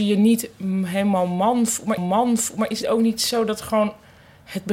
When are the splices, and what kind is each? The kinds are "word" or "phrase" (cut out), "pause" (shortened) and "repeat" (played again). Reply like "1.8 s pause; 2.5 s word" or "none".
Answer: 2.0 s repeat; 2.8 s word